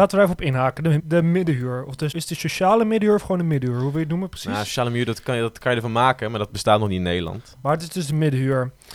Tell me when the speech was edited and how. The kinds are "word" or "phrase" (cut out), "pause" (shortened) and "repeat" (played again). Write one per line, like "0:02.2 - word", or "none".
0:01.0 - word
0:02.1 - word